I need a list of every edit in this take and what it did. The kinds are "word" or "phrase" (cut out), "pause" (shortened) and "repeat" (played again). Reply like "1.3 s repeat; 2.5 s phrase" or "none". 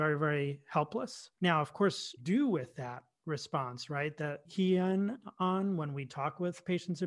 1.3 s pause; 2.2 s phrase; 4.5 s phrase